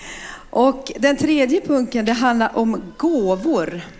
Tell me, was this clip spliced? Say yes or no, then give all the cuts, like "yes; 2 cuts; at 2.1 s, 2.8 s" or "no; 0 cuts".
no; 0 cuts